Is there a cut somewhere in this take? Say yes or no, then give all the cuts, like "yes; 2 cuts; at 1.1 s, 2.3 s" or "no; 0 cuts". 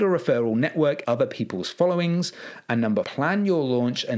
yes; 2 cuts; at 1.0 s, 3.0 s